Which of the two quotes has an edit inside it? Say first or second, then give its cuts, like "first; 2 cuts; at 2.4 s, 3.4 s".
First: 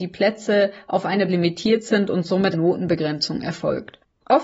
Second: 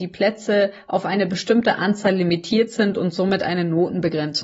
first; 2 cuts; at 1.3 s, 2.5 s